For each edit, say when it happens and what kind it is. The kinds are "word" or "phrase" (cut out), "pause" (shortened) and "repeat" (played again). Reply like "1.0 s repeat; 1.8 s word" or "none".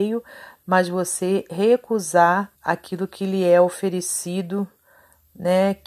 2.5 s pause